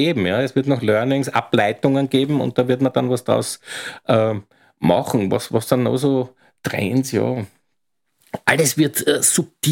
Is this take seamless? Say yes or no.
yes